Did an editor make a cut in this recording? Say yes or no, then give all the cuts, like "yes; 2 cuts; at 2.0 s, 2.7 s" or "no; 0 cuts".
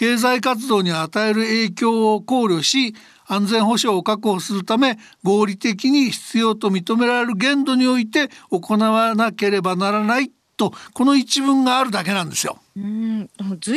no; 0 cuts